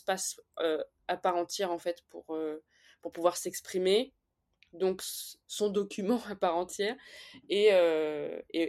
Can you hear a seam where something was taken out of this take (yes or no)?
no